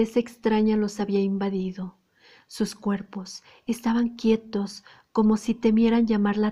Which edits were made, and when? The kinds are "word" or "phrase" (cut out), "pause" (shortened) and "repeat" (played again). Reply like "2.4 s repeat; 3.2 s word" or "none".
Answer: none